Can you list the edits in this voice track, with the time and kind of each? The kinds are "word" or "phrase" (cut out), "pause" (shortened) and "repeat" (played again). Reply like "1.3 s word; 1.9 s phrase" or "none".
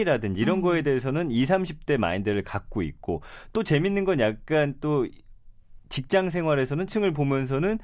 6.9 s word